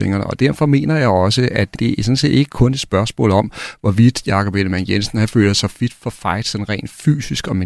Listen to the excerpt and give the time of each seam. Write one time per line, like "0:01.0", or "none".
0:01.8